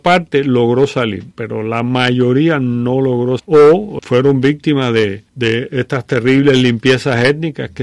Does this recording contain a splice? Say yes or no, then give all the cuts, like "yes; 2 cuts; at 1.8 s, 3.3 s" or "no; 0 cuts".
yes; 4 cuts; at 1.3 s, 3.4 s, 4.0 s, 5.3 s